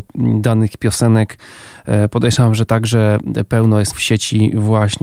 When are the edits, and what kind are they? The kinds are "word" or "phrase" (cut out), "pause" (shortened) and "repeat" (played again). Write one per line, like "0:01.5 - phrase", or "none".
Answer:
0:03.9 - word